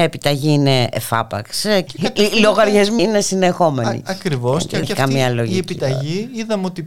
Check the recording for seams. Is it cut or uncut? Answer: cut